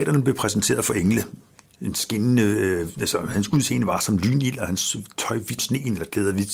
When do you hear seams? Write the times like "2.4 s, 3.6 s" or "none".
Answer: 5.6 s